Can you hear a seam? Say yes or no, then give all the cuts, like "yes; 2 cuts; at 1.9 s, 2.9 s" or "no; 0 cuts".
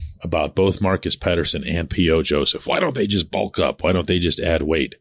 no; 0 cuts